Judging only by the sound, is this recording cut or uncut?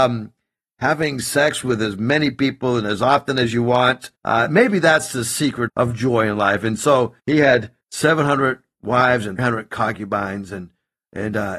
cut